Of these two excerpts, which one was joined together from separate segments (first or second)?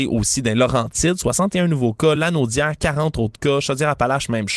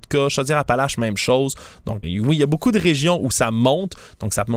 second